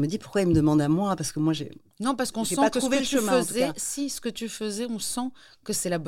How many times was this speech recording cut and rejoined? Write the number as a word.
zero